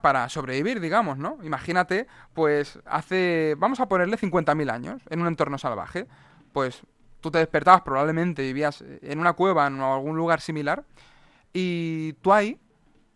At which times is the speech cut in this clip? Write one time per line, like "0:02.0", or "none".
none